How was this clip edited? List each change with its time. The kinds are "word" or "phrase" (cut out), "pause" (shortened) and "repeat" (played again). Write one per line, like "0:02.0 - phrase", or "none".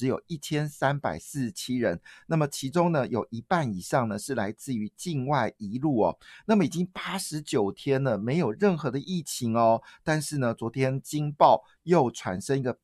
none